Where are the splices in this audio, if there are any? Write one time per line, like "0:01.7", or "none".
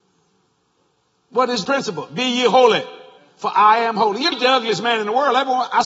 0:01.6
0:03.2
0:04.3